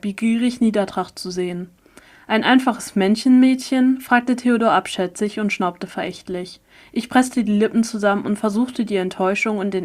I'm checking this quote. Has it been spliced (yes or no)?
no